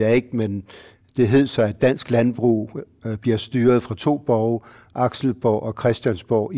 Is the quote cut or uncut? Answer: uncut